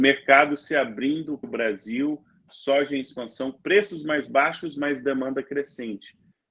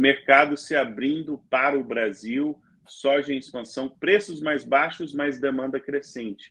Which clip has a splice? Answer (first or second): first